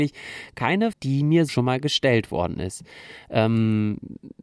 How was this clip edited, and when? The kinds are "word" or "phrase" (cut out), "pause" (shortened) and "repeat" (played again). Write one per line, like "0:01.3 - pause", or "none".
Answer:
0:00.9 - word
0:01.5 - word